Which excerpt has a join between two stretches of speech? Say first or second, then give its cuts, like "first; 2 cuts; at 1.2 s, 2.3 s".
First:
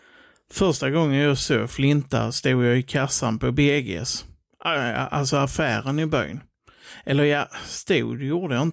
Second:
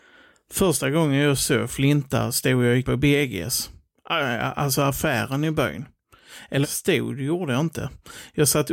second; 2 cuts; at 2.8 s, 6.6 s